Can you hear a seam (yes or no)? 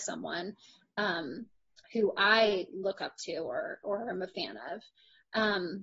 no